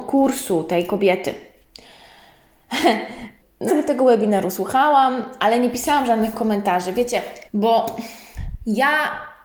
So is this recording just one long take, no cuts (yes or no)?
no